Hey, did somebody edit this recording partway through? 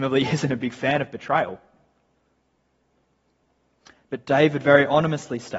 no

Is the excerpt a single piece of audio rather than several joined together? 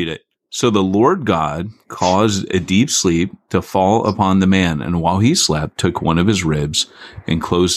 yes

